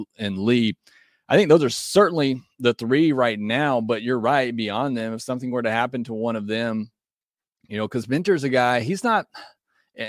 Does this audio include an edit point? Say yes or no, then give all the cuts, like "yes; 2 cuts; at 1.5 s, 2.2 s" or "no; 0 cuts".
no; 0 cuts